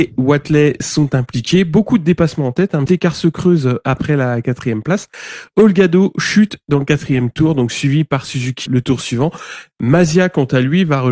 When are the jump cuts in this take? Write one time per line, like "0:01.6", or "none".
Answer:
0:02.9
0:08.7